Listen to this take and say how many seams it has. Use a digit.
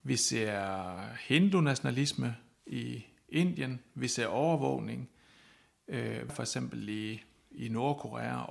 1